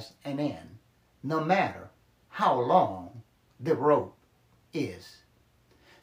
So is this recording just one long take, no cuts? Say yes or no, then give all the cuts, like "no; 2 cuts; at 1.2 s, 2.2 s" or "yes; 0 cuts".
yes; 0 cuts